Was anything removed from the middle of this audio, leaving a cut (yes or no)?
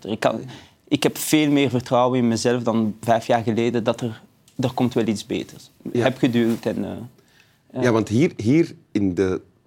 yes